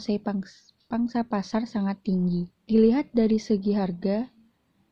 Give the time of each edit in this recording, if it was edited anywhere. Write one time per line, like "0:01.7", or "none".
0:02.5